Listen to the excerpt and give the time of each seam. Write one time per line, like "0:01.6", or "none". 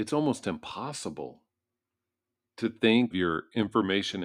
0:03.1